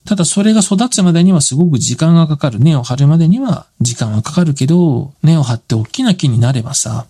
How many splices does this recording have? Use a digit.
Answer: 2